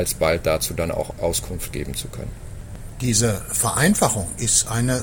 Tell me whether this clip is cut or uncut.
uncut